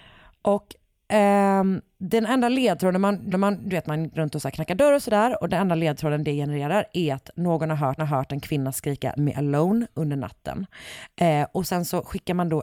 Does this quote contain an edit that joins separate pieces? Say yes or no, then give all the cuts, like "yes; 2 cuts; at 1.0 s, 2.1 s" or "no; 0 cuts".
yes; 4 cuts; at 3.3 s, 4.1 s, 8.0 s, 9.2 s